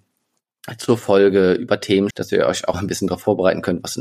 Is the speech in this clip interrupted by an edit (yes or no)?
yes